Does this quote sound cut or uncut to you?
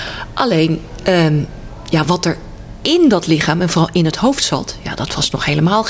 uncut